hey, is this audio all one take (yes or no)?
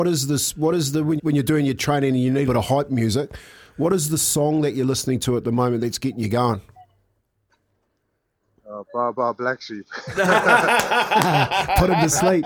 no